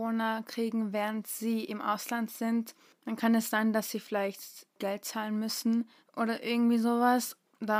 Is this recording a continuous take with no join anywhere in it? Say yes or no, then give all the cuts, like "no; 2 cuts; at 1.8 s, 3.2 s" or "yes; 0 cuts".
yes; 0 cuts